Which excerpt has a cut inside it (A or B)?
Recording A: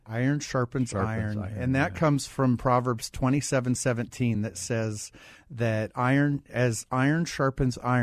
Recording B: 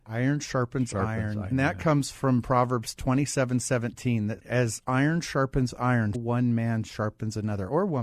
B